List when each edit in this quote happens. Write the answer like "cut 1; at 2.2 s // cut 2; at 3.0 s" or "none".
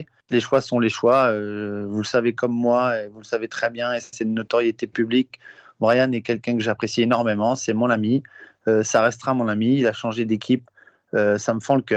none

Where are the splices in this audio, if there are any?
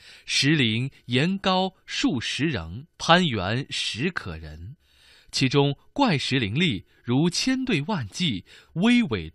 cut 1; at 2.9 s

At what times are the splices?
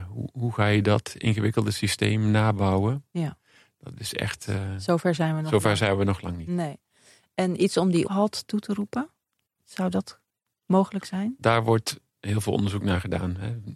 cut 1; at 8.1 s

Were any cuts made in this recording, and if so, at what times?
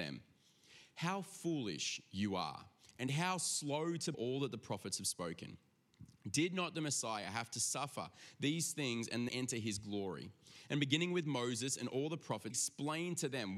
cut 1; at 4.1 s // cut 2; at 9.3 s // cut 3; at 12.5 s

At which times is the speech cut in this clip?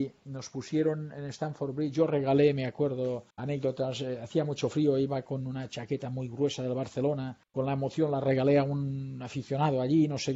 cut 1; at 3.3 s // cut 2; at 7.4 s

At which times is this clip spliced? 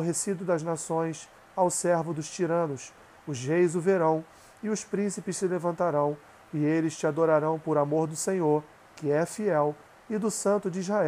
none

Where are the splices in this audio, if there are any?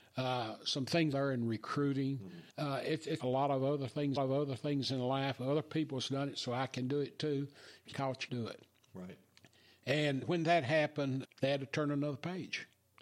cut 1; at 1.1 s // cut 2; at 2.5 s // cut 3; at 3.2 s // cut 4; at 4.2 s // cut 5; at 7.9 s // cut 6; at 8.3 s // cut 7; at 10.2 s // cut 8; at 11.2 s

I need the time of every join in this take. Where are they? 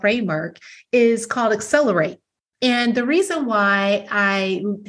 none

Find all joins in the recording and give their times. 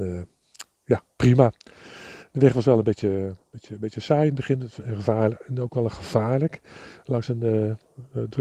none

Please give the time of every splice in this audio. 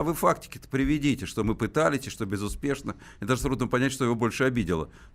none

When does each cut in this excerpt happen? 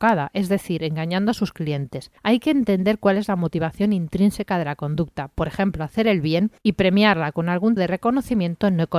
cut 1; at 2.2 s // cut 2; at 6.6 s // cut 3; at 7.8 s

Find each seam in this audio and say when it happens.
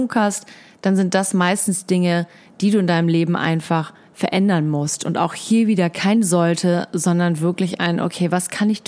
none

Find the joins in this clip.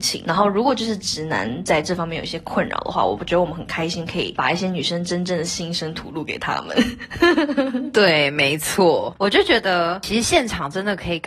none

